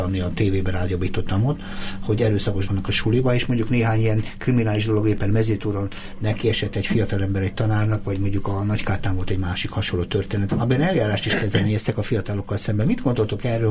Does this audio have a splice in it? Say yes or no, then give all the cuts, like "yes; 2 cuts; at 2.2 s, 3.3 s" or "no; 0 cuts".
yes; 2 cuts; at 2.7 s, 10.5 s